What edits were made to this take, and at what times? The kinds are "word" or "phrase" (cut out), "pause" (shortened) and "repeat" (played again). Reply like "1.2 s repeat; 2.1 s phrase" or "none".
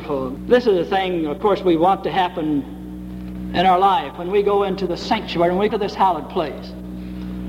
5.7 s word

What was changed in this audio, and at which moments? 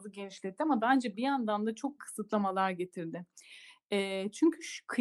2.0 s word

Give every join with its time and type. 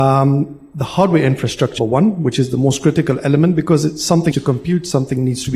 1.8 s word; 4.3 s word

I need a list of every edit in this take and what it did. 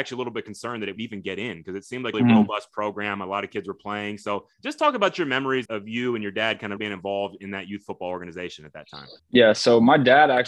1.0 s phrase; 2.1 s word; 4.5 s pause; 5.7 s word; 6.8 s word; 9.2 s pause

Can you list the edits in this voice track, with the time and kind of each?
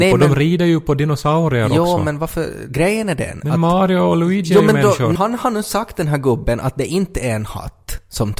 5.2 s word

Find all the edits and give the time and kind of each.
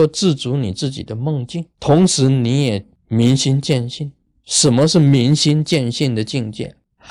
1.7 s pause

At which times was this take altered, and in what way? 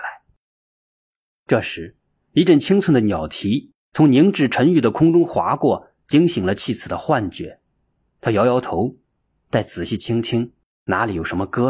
none

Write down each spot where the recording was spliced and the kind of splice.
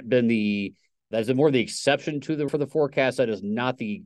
1.1 s word; 2.5 s word

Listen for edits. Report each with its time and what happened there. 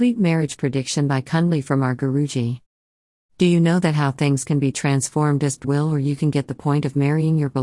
5.6 s word

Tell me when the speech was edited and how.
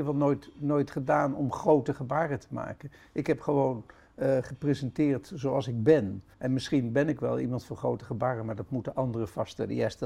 6.3 s pause

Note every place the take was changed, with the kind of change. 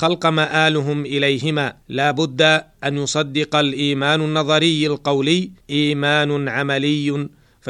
1.8 s pause; 5.6 s pause

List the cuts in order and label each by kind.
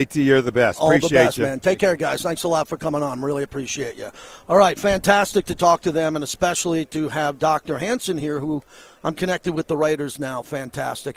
none

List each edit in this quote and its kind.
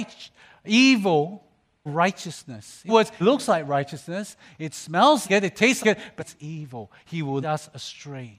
1.9 s word; 2.9 s word; 3.2 s word; 5.2 s word; 5.8 s word; 6.2 s word; 7.4 s word

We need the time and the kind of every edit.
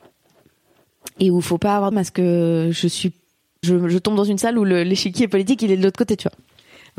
1.9 s phrase; 3.6 s word

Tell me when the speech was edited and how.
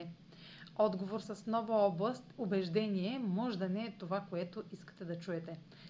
1.2 s word; 2.3 s word

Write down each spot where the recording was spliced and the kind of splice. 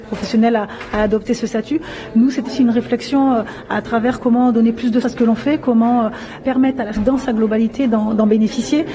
2.5 s word; 5.0 s word; 7.0 s word

